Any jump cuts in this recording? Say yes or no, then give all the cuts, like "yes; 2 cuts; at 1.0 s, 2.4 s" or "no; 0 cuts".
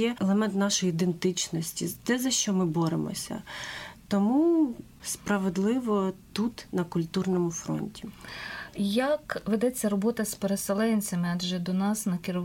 yes; 1 cut; at 6.3 s